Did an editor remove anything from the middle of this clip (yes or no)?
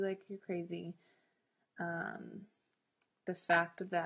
no